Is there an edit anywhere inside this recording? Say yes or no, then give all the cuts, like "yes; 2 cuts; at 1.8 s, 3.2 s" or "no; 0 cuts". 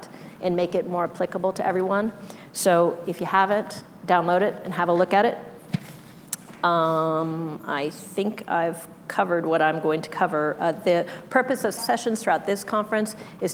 yes; 1 cut; at 11.8 s